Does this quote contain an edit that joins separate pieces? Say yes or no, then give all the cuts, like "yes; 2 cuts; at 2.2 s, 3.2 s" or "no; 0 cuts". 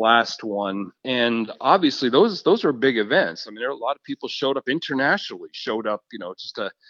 yes; 1 cut; at 1.0 s